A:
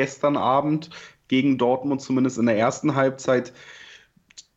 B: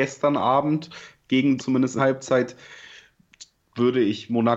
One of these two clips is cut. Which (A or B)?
B